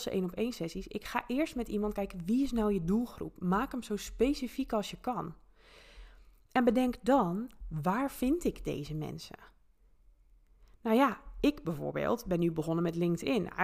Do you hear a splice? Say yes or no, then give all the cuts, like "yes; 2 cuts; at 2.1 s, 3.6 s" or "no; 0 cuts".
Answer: no; 0 cuts